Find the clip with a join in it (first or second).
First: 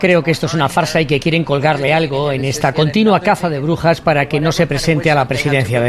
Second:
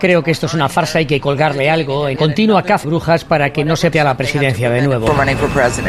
second